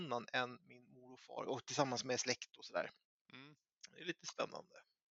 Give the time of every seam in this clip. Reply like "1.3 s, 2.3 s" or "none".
none